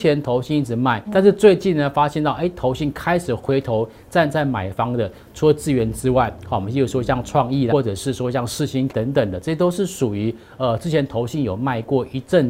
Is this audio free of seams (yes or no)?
no